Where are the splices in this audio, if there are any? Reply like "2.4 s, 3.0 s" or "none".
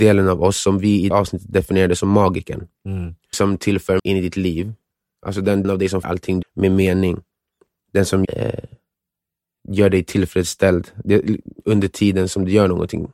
1.1 s, 3.3 s, 4.0 s, 5.6 s, 6.0 s, 6.4 s, 8.2 s